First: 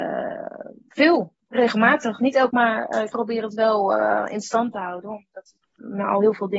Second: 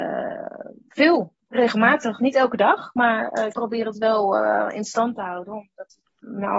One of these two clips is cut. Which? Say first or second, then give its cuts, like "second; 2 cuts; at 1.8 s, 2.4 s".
first; 1 cut; at 2.5 s